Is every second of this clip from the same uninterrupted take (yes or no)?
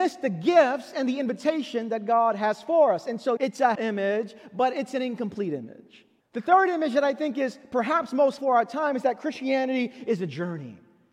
no